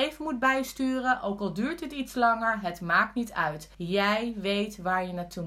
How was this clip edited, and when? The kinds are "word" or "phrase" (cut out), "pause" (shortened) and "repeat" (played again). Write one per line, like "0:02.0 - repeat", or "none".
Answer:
0:03.7 - pause